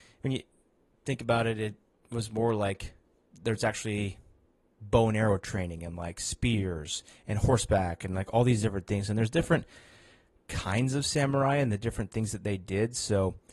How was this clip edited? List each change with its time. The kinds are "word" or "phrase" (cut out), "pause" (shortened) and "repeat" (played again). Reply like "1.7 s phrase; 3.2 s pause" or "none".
3.2 s pause